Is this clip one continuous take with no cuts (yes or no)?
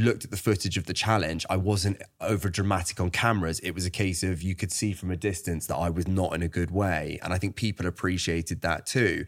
yes